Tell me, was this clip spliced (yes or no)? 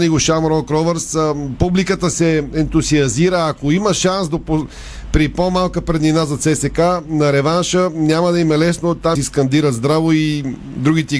yes